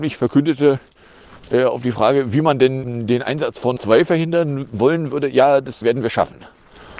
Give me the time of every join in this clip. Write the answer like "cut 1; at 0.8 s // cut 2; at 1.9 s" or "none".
cut 1; at 2.8 s // cut 2; at 3.8 s // cut 3; at 5.8 s

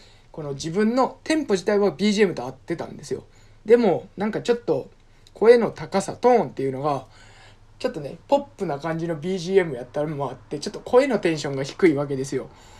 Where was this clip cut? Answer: none

